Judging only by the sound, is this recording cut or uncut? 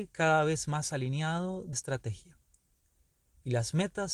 cut